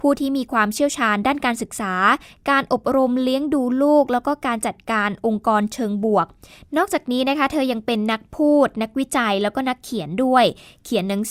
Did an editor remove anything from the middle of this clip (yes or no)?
no